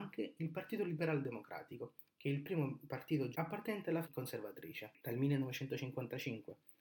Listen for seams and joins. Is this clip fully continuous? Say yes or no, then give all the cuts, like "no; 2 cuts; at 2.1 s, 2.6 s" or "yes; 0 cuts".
no; 2 cuts; at 3.3 s, 4.0 s